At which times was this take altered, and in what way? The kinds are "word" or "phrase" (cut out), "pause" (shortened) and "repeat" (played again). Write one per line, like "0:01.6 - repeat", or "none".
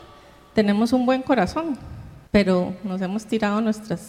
0:02.3 - pause